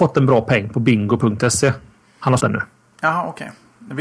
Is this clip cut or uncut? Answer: cut